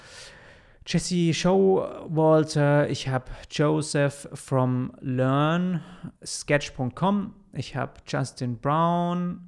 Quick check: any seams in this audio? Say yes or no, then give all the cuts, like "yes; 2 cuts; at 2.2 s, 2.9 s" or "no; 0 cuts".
yes; 1 cut; at 6.2 s